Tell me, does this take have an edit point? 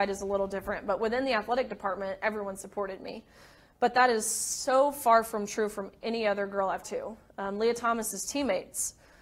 yes; 1 cut; at 6.8 s

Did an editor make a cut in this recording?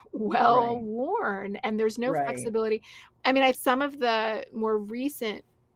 yes; 1 cut; at 3.5 s

